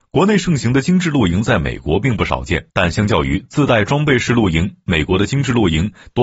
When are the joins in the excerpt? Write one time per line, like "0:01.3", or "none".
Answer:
0:02.7